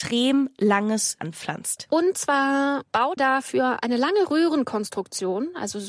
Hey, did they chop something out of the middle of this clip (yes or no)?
yes